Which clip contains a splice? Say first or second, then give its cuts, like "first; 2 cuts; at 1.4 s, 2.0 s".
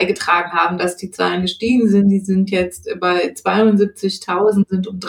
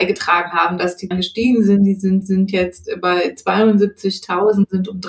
second; 2 cuts; at 1.1 s, 2.2 s